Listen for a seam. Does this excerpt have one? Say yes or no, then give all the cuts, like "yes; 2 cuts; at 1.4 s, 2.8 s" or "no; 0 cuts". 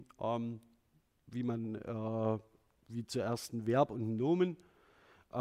no; 0 cuts